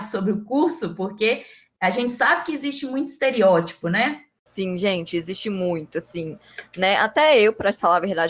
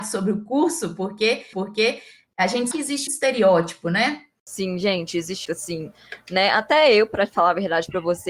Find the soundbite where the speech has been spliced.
second; 4 cuts; at 1.5 s, 2.7 s, 3.1 s, 5.4 s

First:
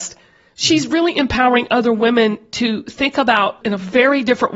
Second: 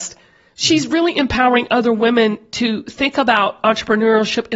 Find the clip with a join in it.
first; 1 cut; at 3.6 s

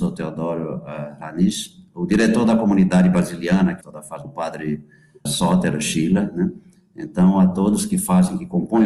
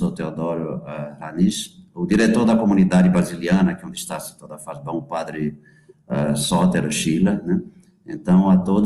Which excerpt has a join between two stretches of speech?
first; 3 cuts; at 3.8 s, 4.2 s, 5.3 s

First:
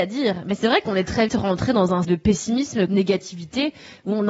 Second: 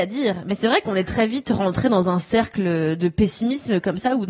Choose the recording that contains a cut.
first; 3 cuts; at 1.3 s, 2.0 s, 2.9 s

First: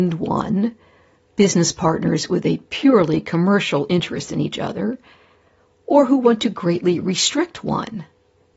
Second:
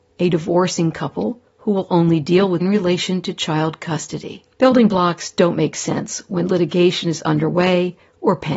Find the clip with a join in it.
second; 3 cuts; at 1.5 s, 2.6 s, 4.5 s

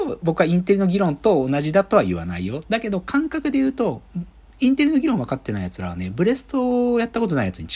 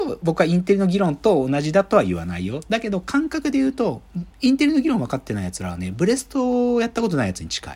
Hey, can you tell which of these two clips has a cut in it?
second; 1 cut; at 4.3 s

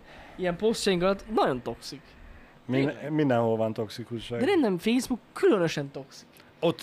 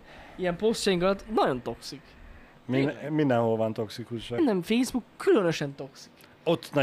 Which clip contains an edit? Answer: second; 1 cut; at 4.4 s

